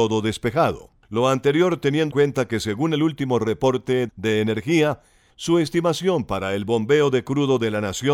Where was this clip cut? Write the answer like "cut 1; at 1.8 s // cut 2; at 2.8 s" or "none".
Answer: cut 1; at 1.0 s // cut 2; at 2.1 s // cut 3; at 4.1 s // cut 4; at 5.3 s